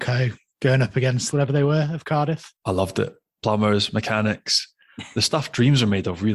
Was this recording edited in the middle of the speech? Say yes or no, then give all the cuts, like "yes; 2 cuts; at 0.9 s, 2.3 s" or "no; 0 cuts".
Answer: yes; 1 cut; at 1.3 s